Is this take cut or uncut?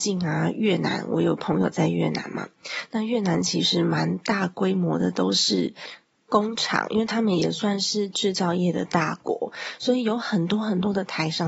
uncut